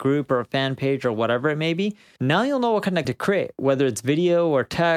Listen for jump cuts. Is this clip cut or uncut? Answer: cut